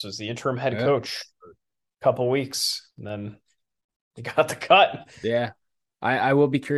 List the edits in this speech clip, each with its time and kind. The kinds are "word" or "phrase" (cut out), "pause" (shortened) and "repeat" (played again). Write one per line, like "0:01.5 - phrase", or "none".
none

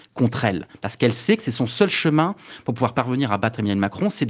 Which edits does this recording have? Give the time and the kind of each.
none

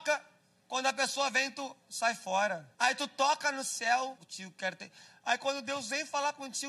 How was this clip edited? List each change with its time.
0:02.7 - pause
0:04.2 - phrase

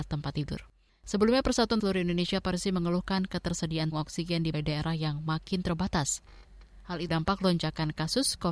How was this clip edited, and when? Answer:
0:01.8 - phrase
0:03.9 - word
0:04.5 - word
0:07.1 - word

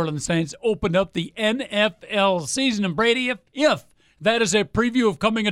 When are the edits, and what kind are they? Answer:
0:03.5 - pause

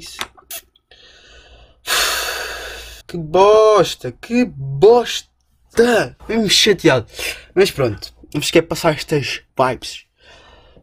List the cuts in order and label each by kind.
0:03.0 - pause
0:06.2 - pause
0:08.2 - pause
0:09.5 - pause

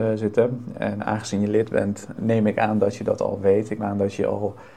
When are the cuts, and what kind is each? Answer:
0:01.0 - word
0:02.2 - word
0:03.8 - word

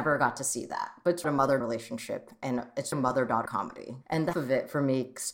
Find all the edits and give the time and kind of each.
0:01.2 - phrase
0:01.6 - word
0:02.9 - word
0:03.5 - word
0:04.3 - word

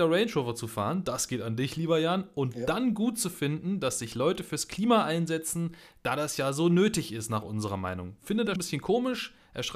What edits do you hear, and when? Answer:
0:08.6 - word

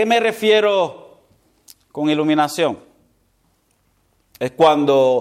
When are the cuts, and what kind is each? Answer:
none

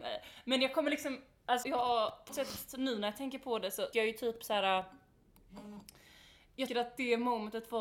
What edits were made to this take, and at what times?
0:01.6 - word
0:02.3 - word
0:03.9 - word
0:06.7 - word

